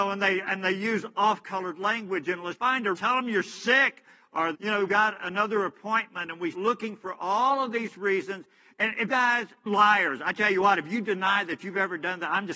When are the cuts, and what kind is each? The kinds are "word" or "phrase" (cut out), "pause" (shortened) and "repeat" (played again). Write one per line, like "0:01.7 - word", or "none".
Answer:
0:02.6 - word
0:02.9 - word
0:04.5 - word
0:04.9 - word
0:06.5 - word
0:09.1 - word
0:09.7 - word